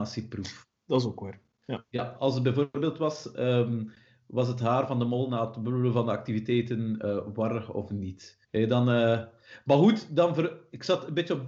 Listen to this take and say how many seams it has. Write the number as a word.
one